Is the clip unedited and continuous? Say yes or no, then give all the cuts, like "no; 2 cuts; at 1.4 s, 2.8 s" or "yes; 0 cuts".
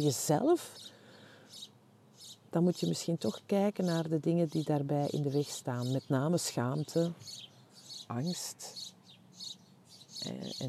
yes; 0 cuts